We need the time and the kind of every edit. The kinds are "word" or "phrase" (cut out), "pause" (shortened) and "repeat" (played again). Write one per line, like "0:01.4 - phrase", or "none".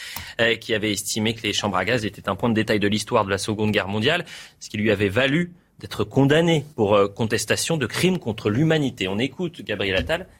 0:06.7 - pause